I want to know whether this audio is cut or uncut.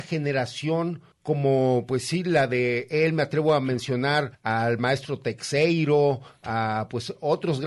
cut